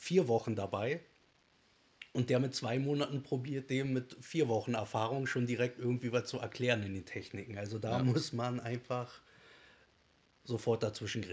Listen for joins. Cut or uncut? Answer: uncut